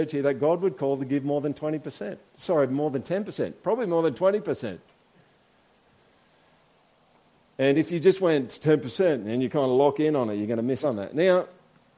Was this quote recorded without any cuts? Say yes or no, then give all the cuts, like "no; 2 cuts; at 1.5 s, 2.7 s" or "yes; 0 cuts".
no; 1 cut; at 10.8 s